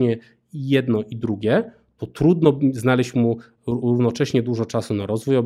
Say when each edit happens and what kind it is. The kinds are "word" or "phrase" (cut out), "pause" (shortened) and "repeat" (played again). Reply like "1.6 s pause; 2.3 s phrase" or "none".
none